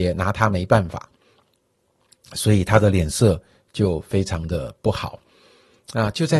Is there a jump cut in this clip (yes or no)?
no